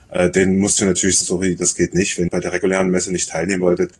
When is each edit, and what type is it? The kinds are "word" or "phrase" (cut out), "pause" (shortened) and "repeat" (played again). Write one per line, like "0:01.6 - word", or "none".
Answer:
0:01.2 - word
0:02.3 - word